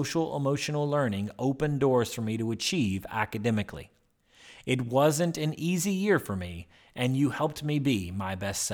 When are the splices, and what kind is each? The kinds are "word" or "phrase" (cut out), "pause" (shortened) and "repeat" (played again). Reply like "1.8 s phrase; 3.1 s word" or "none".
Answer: none